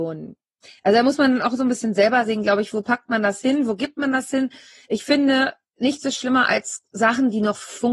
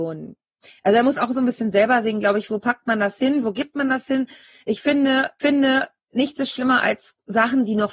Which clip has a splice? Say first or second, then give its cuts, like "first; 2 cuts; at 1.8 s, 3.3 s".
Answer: second; 2 cuts; at 1.2 s, 5.4 s